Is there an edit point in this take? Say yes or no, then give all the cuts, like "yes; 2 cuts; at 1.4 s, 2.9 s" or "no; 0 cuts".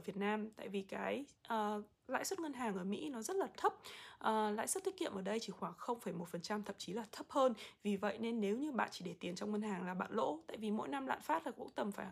no; 0 cuts